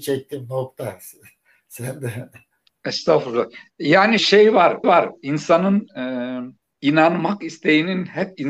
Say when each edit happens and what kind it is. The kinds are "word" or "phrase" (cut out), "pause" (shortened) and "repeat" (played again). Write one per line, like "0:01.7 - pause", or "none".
0:04.2 - word
0:04.8 - repeat
0:06.6 - pause